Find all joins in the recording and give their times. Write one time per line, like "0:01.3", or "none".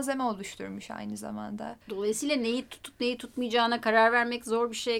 0:01.8